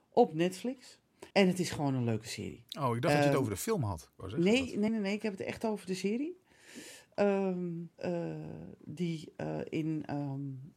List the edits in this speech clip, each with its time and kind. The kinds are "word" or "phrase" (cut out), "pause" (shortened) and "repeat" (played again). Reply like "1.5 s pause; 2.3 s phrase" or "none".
1.3 s pause; 4.9 s word; 7.9 s pause